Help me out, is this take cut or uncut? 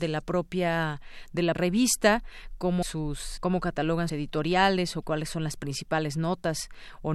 cut